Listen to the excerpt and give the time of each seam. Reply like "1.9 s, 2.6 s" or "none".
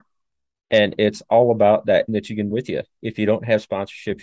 2.1 s, 2.5 s